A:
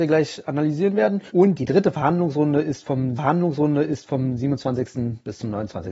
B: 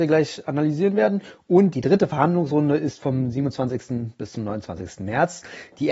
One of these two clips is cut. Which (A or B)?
A